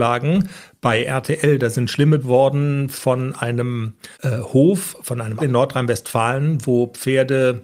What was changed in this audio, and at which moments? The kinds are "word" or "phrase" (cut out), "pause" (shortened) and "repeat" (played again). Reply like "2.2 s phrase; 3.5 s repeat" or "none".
2.2 s phrase; 4.1 s pause; 5.4 s word